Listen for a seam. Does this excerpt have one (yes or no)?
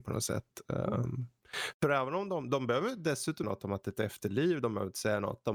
yes